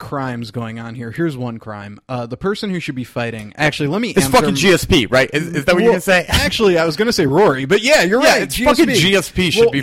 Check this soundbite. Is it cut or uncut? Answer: uncut